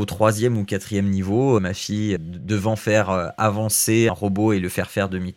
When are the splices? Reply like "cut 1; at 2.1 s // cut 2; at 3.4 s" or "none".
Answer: cut 1; at 1.6 s // cut 2; at 2.2 s // cut 3; at 4.1 s